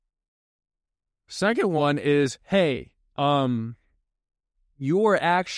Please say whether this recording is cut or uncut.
uncut